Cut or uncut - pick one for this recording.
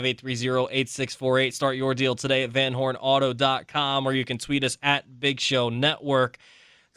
uncut